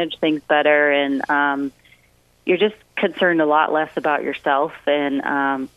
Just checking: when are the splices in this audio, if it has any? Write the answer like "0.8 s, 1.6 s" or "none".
none